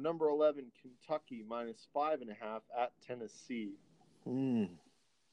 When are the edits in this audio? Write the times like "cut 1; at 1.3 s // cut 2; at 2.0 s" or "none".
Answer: none